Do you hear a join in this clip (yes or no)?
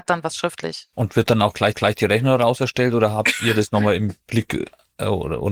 yes